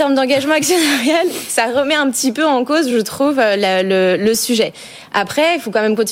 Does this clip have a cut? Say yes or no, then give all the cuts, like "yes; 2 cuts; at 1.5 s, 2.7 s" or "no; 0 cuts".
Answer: no; 0 cuts